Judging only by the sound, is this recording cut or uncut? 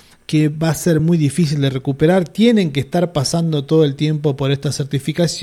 uncut